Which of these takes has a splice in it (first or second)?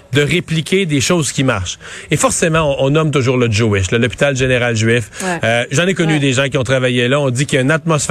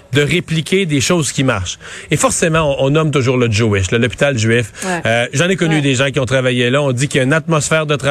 second